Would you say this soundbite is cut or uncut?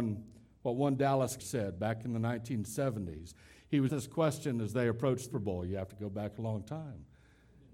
cut